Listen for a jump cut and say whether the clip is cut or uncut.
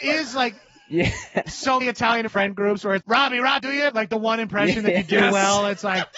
cut